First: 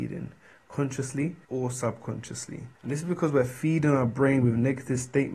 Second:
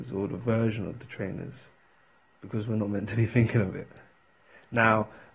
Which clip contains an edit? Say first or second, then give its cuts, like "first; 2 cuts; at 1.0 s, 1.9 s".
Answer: first; 2 cuts; at 1.4 s, 2.8 s